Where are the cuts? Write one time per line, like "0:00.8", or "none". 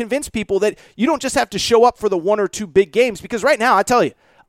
none